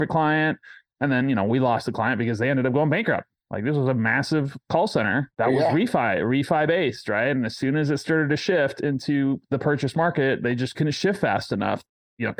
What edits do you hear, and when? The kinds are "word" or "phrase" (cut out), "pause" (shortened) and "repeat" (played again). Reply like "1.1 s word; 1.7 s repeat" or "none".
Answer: none